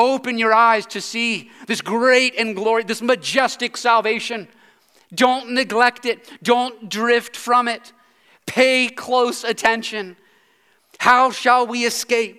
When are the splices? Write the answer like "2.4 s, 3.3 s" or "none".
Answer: none